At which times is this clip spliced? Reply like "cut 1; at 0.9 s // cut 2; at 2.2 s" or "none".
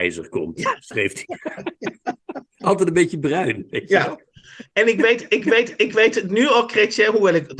cut 1; at 5.4 s